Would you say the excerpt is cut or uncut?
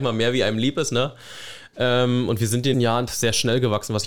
cut